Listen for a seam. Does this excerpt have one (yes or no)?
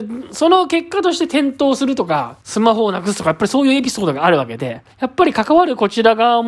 yes